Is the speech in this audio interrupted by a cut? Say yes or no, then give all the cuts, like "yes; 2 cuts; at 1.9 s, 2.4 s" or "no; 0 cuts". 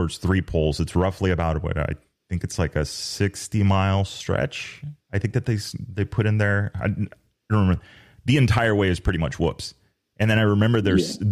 no; 0 cuts